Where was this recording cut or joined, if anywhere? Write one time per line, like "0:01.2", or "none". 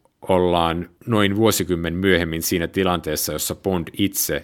none